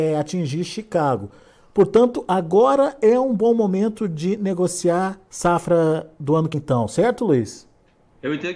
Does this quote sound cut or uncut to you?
cut